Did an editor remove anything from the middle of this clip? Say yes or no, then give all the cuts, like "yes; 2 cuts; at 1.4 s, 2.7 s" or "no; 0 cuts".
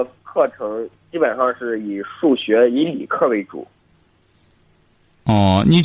no; 0 cuts